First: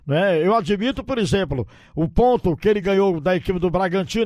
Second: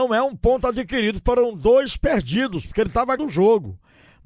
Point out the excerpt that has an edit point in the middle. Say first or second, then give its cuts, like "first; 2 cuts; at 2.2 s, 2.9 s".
second; 1 cut; at 3.2 s